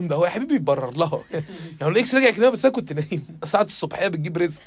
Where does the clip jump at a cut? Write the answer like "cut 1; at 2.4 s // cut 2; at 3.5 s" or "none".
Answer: none